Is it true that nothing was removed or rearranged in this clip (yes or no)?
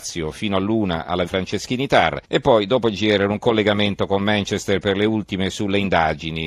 no